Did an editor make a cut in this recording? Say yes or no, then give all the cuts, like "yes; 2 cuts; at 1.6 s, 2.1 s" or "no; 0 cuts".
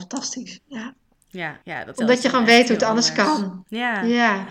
yes; 2 cuts; at 1.6 s, 1.9 s